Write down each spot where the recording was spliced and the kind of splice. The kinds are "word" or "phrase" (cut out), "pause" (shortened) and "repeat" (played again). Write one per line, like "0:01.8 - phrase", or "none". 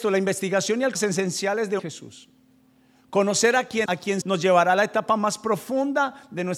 0:00.9 - phrase
0:01.8 - phrase
0:02.6 - pause
0:03.8 - word
0:04.2 - word